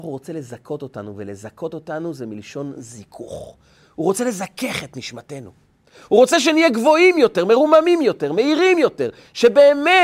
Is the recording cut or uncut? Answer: uncut